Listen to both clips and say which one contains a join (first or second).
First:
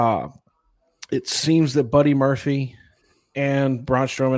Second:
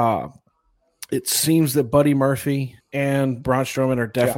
second